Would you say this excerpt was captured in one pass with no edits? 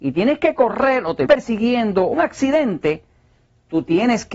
no; 2 cuts; at 1.3 s, 2.1 s

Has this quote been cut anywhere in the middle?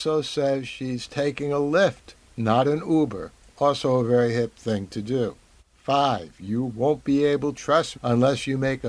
yes; 5 cuts; at 2.2 s, 3.4 s, 5.6 s, 7.6 s, 7.9 s

